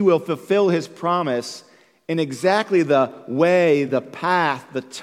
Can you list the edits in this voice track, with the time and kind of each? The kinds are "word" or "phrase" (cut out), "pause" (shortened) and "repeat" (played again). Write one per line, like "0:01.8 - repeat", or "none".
none